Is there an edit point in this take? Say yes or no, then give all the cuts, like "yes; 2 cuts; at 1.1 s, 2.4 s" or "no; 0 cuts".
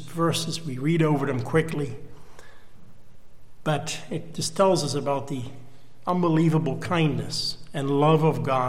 no; 0 cuts